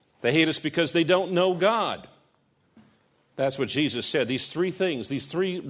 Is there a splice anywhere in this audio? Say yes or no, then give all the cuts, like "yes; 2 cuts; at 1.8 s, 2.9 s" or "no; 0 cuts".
no; 0 cuts